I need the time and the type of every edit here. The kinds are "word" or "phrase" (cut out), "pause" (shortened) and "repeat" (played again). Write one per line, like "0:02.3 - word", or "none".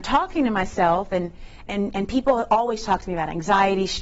0:01.7 - word